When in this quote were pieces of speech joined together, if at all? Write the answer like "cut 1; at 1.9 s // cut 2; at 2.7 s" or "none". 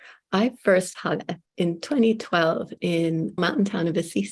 cut 1; at 0.9 s // cut 2; at 1.4 s // cut 3; at 3.4 s